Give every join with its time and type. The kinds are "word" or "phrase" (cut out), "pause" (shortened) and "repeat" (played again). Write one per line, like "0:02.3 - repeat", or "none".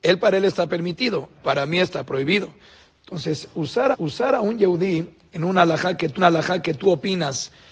0:01.4 - pause
0:03.9 - repeat
0:06.2 - repeat